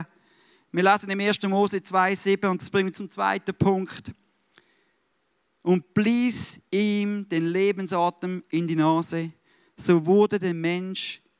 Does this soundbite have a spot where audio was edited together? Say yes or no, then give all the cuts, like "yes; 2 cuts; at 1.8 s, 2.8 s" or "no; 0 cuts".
no; 0 cuts